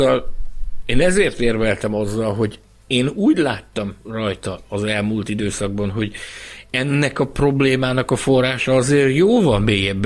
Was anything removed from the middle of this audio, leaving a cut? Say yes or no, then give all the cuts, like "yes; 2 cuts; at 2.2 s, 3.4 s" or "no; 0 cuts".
yes; 1 cut; at 4.0 s